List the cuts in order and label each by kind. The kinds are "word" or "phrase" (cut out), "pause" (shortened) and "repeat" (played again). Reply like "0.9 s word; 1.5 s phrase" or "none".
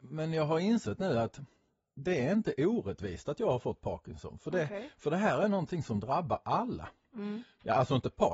none

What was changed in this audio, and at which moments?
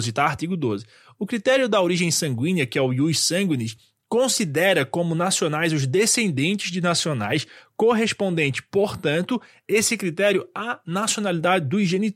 none

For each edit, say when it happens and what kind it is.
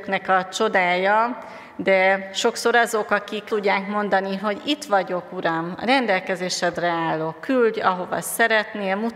3.5 s word

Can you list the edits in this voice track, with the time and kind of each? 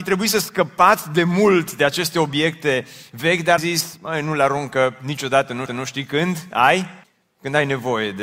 3.6 s word; 5.7 s repeat; 7.0 s pause

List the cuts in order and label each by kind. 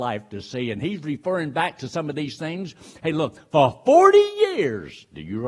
none

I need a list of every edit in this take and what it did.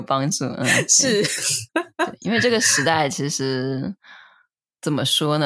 1.7 s pause

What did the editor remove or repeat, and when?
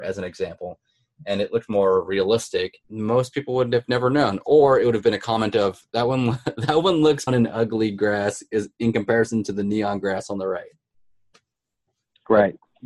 2.8 s pause; 5.9 s pause; 7.3 s word

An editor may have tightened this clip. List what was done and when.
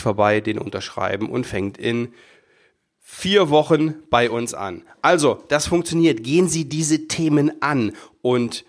none

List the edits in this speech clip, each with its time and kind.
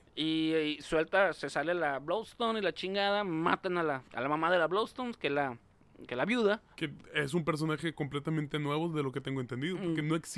4.1 s pause; 6.7 s pause

